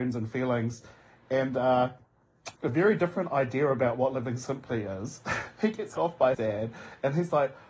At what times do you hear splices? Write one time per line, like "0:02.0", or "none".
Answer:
0:02.5
0:06.0
0:06.3